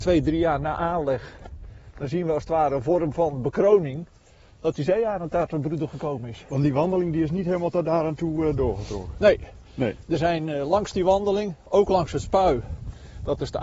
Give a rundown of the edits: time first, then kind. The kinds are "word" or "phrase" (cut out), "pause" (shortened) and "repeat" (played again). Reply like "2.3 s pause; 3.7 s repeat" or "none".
none